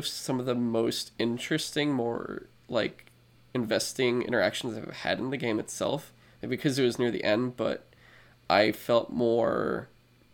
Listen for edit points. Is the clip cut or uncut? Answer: uncut